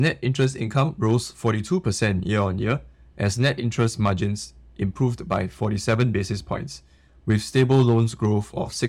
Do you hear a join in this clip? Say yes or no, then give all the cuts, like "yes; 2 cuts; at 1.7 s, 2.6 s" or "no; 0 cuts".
no; 0 cuts